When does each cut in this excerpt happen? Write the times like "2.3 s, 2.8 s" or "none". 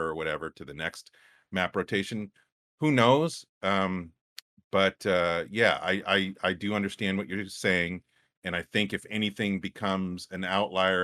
none